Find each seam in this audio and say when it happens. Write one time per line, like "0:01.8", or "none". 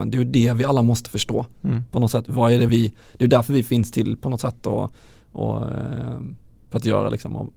none